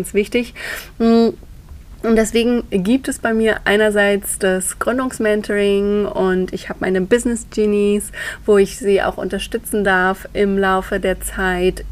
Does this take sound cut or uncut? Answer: uncut